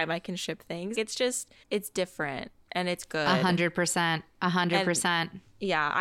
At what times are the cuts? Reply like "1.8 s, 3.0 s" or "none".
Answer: 0.9 s, 1.6 s